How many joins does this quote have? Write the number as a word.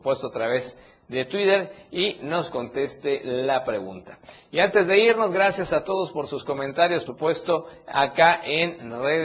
one